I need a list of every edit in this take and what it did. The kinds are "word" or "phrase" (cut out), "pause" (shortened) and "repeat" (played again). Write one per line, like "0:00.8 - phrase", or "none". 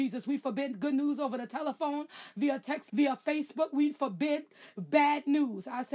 0:02.9 - word

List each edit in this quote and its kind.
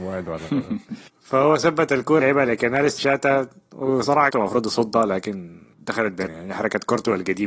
0:01.1 - pause
0:02.2 - word
0:03.0 - word
0:04.3 - word
0:05.7 - word
0:06.3 - word

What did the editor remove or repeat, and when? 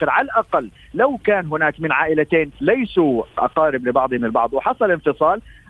none

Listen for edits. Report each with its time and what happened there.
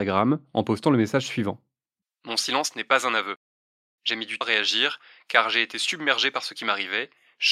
0:04.4 - word

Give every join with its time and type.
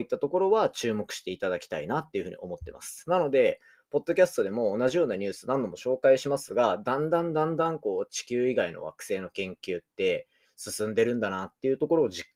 none

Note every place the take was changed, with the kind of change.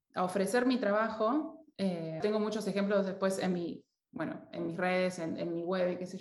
0:02.2 - word

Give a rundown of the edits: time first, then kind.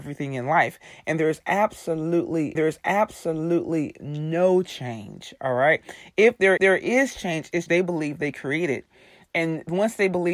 0:02.6 - repeat
0:06.6 - repeat
0:07.7 - word

